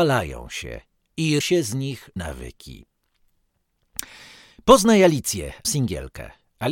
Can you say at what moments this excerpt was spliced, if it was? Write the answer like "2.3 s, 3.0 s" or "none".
1.4 s, 2.2 s, 5.6 s